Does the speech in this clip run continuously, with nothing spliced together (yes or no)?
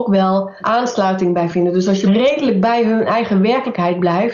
yes